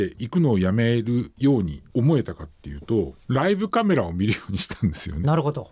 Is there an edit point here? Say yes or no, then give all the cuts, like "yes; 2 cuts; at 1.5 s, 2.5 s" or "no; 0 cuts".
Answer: no; 0 cuts